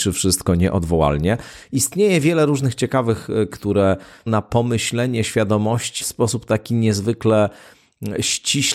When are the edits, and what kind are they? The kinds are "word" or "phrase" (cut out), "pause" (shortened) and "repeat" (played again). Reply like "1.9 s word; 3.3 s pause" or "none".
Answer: 3.5 s word; 4.3 s word; 6.0 s word